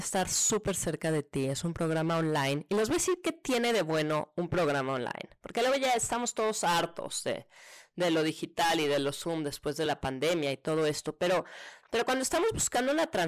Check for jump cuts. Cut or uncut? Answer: uncut